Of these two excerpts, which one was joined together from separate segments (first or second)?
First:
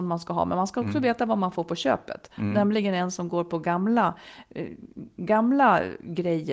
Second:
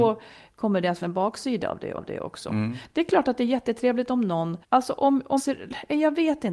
second